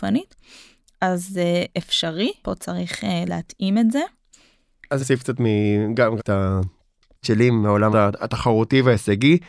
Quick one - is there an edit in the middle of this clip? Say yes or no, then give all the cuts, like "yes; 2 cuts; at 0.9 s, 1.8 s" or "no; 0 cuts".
yes; 6 cuts; at 2.4 s, 3.3 s, 5.0 s, 6.2 s, 7.2 s, 7.9 s